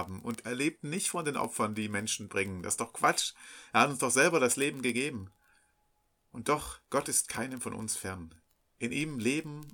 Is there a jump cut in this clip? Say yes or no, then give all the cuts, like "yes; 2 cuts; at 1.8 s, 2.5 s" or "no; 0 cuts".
yes; 1 cut; at 6.8 s